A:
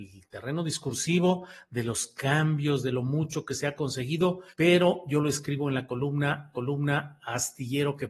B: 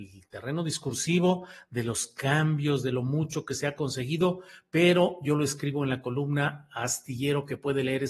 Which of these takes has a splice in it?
A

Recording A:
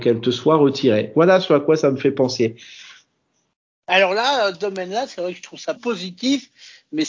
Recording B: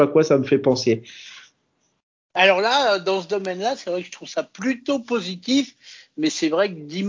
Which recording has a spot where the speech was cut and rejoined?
A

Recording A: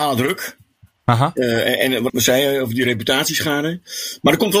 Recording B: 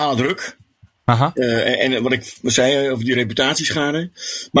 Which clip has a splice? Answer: A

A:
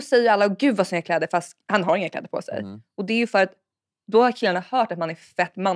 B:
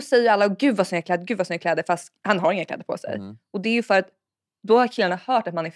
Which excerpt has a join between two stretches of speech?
A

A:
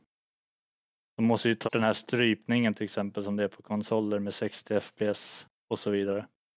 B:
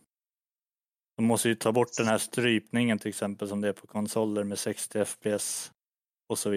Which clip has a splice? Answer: A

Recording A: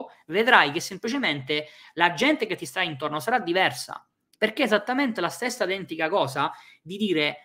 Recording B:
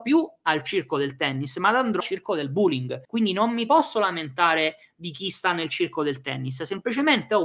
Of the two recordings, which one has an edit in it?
B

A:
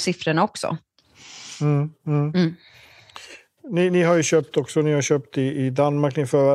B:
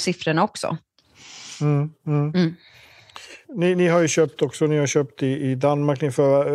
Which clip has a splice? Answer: B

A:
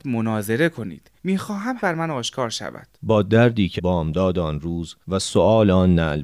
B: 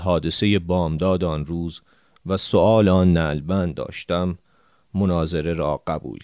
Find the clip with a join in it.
A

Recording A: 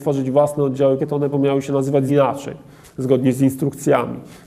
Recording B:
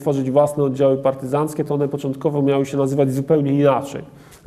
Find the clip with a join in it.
A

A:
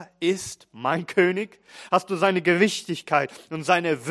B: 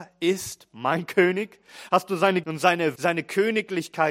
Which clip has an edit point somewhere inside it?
B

